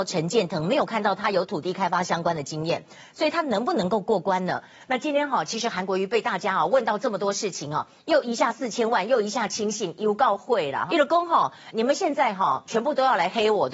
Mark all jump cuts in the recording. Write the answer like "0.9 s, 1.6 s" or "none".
10.9 s, 11.7 s

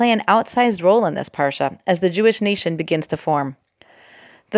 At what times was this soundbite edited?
none

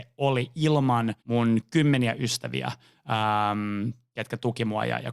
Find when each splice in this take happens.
1.2 s

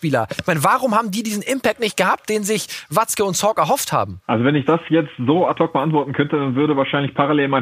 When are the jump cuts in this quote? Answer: 4.2 s

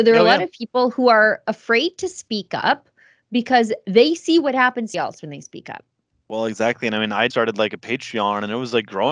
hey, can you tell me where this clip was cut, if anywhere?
4.9 s, 7.3 s

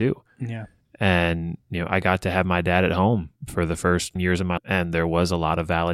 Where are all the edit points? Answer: 1.6 s, 3.4 s, 4.2 s, 4.6 s

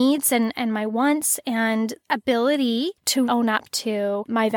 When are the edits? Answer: 2.0 s, 3.3 s

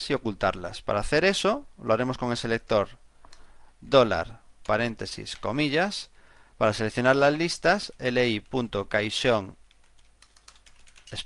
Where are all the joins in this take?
none

